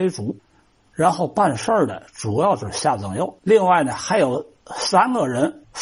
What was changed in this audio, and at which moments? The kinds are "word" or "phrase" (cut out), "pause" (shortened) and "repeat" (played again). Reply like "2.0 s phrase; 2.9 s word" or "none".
3.4 s pause